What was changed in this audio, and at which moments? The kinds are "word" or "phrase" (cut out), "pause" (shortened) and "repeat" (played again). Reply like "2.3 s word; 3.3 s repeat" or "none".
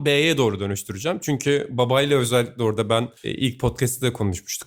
3.2 s pause

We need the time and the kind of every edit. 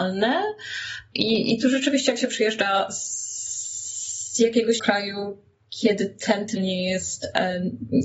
4.8 s word; 6.6 s word

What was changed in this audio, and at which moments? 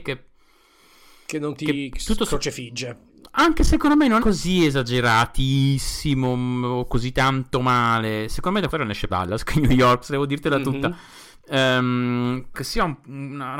4.2 s word; 8.7 s word; 9.1 s word; 12.5 s word

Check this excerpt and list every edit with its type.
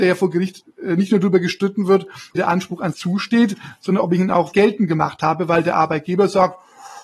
2.4 s phrase; 2.9 s word; 4.5 s word

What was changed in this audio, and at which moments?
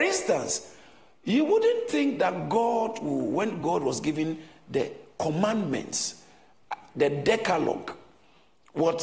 none

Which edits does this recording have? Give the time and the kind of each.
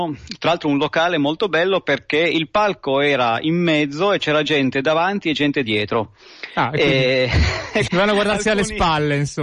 7.9 s word

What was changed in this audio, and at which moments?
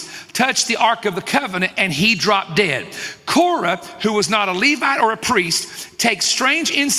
none

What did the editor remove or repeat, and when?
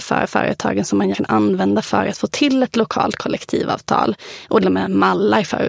1.1 s word; 4.6 s phrase

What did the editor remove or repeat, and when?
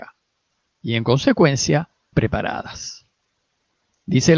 2.1 s word

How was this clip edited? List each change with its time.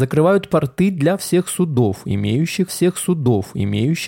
2.7 s repeat

